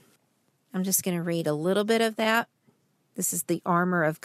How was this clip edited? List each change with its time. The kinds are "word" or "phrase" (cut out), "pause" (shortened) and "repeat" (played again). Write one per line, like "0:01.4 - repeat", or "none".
none